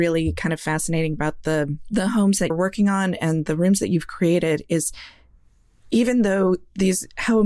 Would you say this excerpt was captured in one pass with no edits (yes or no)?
no